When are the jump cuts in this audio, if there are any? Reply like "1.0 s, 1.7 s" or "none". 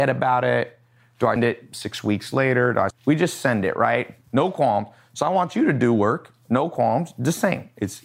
1.4 s, 2.9 s, 4.2 s